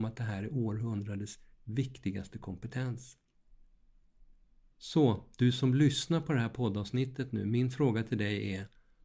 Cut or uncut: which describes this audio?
uncut